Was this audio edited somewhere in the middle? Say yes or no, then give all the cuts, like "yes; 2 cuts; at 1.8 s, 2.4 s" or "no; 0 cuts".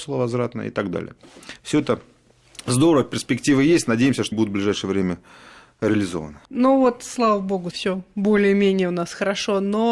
yes; 3 cuts; at 4.3 s, 6.4 s, 7.7 s